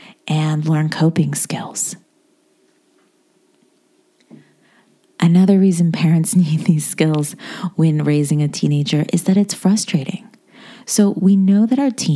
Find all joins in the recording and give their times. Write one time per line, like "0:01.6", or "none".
none

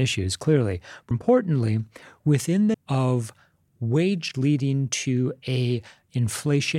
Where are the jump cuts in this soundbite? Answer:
0:01.1
0:02.7
0:04.3

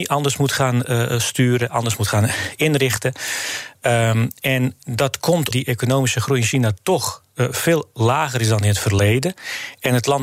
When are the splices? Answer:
0:05.5

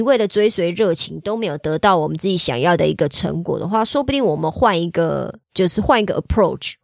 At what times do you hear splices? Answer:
0:05.4

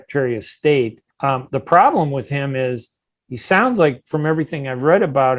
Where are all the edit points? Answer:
0:01.1

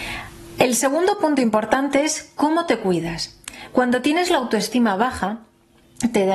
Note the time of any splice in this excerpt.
none

